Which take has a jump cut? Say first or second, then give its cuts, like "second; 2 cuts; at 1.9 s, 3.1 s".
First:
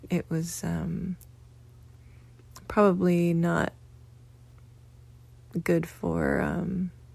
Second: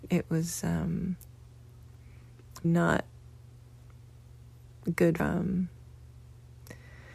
second; 2 cuts; at 2.6 s, 5.2 s